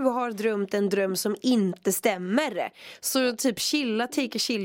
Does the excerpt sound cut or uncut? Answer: uncut